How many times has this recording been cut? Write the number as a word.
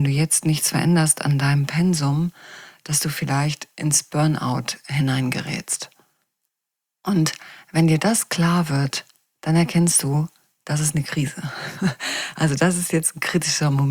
zero